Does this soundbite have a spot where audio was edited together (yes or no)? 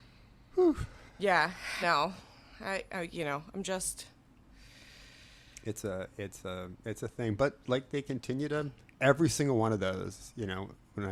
yes